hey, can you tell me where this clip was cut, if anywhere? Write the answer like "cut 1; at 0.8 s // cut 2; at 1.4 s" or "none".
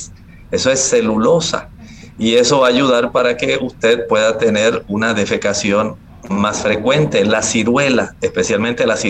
none